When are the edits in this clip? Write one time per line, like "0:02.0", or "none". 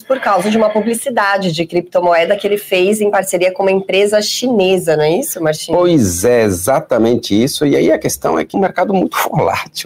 0:08.5